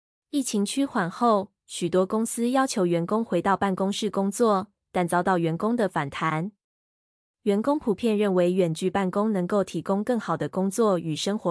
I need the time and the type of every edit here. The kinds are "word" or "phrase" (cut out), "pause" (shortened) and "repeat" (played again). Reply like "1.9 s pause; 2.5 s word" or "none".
none